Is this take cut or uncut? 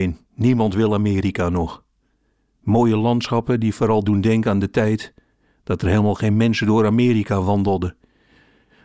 uncut